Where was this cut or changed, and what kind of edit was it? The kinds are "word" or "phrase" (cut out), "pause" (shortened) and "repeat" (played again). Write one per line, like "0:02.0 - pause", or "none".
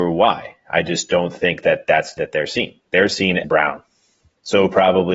0:02.2 - word
0:03.4 - word